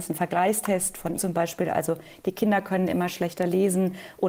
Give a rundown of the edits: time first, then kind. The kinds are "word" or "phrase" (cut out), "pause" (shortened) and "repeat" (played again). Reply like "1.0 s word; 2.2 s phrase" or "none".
1.2 s word

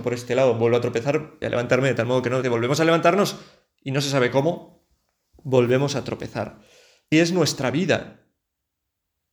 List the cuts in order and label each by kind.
1.4 s word; 2.4 s word; 7.1 s word

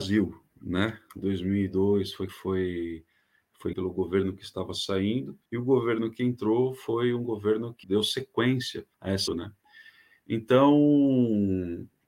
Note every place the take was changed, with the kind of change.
1.2 s phrase; 2.3 s word; 3.7 s word; 5.5 s pause; 7.8 s word; 8.9 s pause; 9.3 s phrase

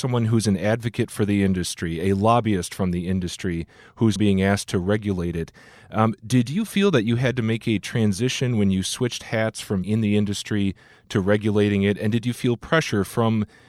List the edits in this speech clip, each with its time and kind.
4.2 s word; 9.8 s word

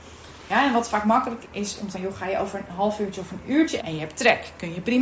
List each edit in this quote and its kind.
1.4 s word; 1.9 s word; 3.8 s word

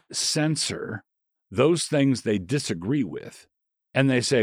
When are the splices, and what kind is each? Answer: none

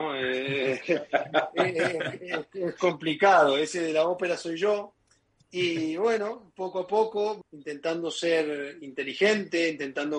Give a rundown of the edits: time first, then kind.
7.4 s phrase

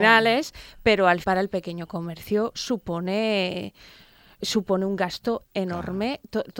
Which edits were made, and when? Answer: 1.2 s word; 4.4 s word; 5.4 s word

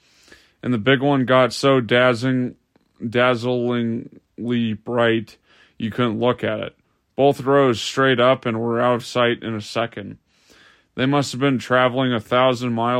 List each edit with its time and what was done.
none

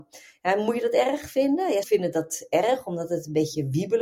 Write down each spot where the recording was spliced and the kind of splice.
1.8 s word

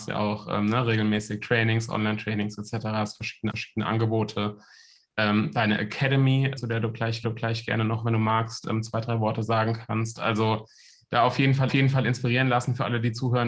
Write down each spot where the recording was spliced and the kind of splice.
3.5 s repeat; 6.6 s word; 7.2 s repeat; 11.7 s repeat

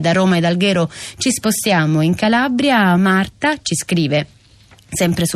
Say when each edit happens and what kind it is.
none

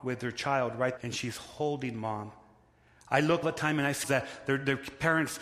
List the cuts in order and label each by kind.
1.0 s word; 3.4 s word; 4.0 s word

